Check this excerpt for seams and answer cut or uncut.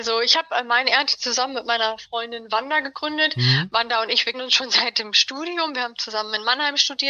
cut